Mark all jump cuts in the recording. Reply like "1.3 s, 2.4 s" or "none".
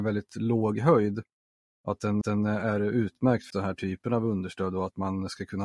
2.2 s, 3.5 s